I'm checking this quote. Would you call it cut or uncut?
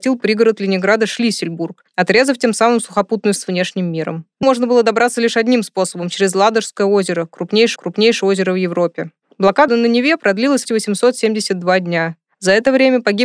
cut